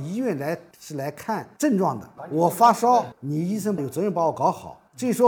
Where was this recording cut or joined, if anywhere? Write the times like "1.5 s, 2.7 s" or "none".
3.1 s